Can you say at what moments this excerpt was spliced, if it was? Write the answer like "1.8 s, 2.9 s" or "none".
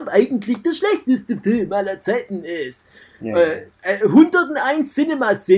none